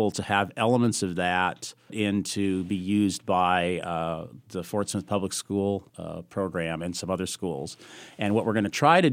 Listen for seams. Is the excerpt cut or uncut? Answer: cut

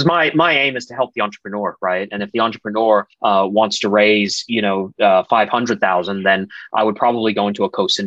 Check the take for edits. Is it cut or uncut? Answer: cut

